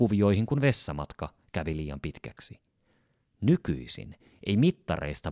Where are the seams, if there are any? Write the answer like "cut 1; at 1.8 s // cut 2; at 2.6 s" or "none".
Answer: none